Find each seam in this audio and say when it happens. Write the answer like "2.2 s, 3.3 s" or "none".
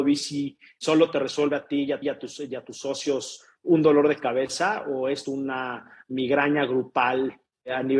2.0 s, 5.3 s